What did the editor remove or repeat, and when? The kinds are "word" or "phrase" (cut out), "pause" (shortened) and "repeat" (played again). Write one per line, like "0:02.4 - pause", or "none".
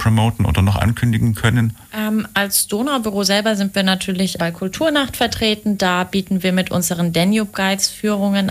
0:01.8 - pause
0:04.4 - word